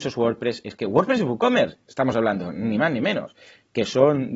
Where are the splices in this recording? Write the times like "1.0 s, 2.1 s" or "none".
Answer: none